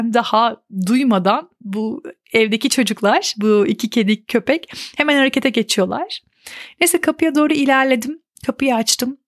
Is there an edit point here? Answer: no; 0 cuts

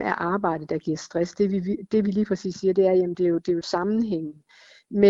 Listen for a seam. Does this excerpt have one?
no; 0 cuts

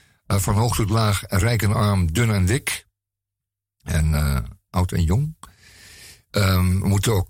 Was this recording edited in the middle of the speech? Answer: no; 0 cuts

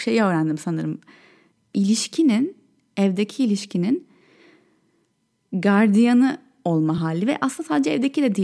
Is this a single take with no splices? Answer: yes; 0 cuts

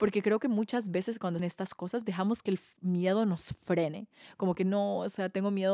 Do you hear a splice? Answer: yes; 1 cut; at 1.4 s

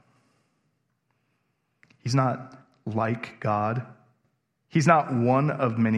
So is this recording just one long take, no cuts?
yes; 0 cuts

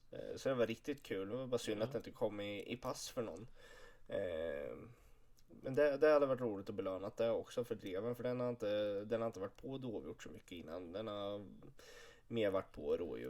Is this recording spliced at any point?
no; 0 cuts

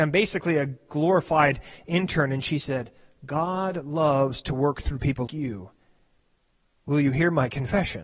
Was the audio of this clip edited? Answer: yes; 1 cut; at 5.3 s

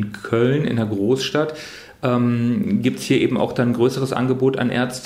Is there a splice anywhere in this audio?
no; 0 cuts

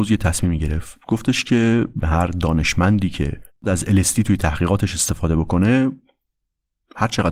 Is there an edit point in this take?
yes; 2 cuts; at 2.0 s, 3.6 s

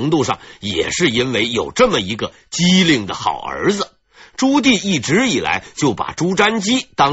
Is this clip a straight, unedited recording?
no; 1 cut; at 4.0 s

